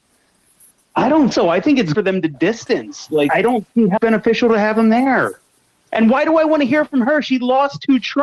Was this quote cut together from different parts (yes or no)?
yes